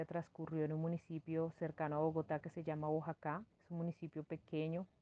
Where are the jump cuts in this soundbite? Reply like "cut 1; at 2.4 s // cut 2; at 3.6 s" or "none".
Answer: cut 1; at 3.5 s